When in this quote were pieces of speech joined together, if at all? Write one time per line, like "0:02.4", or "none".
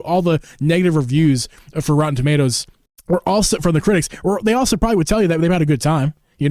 0:02.9